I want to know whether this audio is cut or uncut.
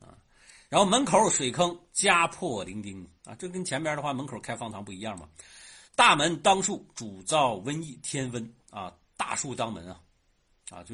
cut